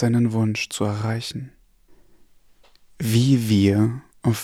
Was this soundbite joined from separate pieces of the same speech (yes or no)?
no